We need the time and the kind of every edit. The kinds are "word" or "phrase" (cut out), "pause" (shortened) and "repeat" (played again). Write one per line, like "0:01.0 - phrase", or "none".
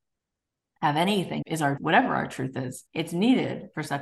0:01.4 - word
0:01.8 - word
0:02.9 - pause